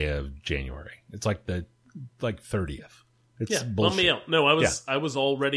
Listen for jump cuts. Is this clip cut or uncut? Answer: uncut